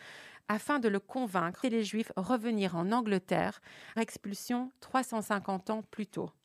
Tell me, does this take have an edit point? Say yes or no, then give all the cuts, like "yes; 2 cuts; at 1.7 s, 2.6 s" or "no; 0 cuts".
yes; 2 cuts; at 1.6 s, 4.0 s